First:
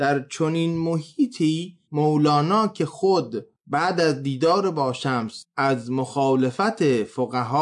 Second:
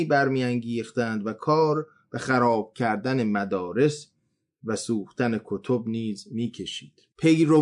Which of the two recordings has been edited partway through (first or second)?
first